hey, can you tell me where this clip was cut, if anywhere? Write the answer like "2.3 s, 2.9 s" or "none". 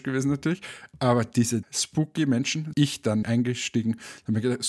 1.6 s, 2.7 s, 3.2 s